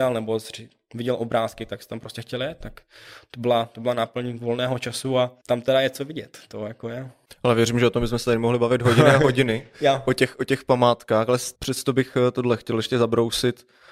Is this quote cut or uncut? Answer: cut